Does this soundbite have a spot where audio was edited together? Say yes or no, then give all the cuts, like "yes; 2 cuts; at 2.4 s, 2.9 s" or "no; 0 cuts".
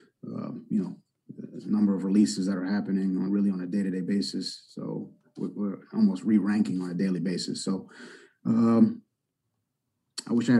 no; 0 cuts